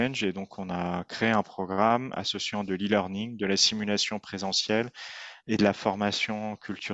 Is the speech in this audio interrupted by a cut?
no; 0 cuts

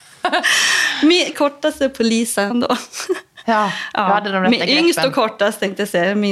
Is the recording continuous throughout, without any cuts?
no; 2 cuts; at 1.3 s, 2.5 s

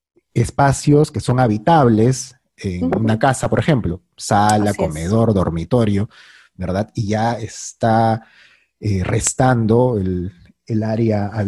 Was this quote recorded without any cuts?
yes; 0 cuts

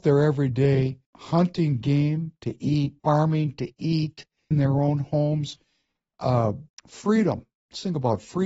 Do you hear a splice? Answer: yes; 4 cuts; at 1.1 s, 3.0 s, 4.5 s, 6.7 s

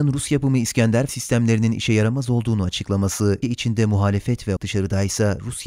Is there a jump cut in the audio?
yes; 3 cuts; at 1.1 s, 3.4 s, 4.6 s

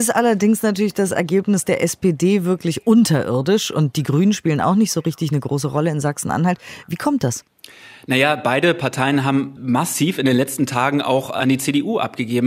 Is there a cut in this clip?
no; 0 cuts

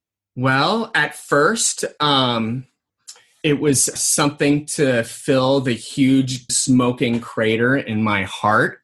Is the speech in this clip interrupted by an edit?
yes; 2 cuts; at 4.0 s, 6.5 s

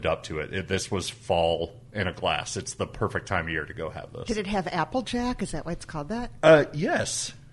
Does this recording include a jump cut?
no; 0 cuts

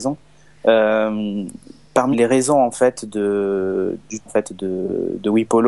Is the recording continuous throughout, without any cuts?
no; 2 cuts; at 2.1 s, 4.3 s

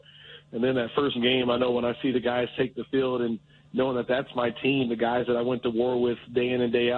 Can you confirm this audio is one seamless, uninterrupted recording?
no; 1 cut; at 1.1 s

